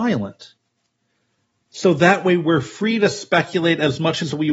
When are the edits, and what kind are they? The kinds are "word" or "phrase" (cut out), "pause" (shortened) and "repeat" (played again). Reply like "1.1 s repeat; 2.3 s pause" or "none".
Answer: none